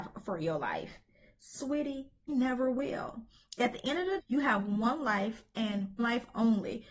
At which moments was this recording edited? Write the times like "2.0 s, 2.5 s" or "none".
2.3 s, 4.2 s, 6.0 s